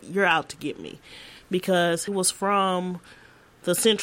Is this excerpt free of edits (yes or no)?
no